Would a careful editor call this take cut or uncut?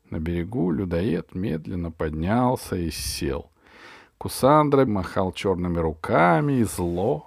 cut